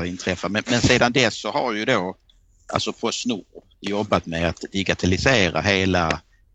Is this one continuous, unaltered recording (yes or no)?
yes